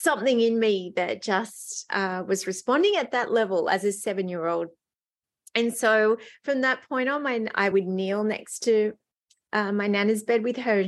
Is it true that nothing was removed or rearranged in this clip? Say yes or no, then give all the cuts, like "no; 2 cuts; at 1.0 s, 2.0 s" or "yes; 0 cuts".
yes; 0 cuts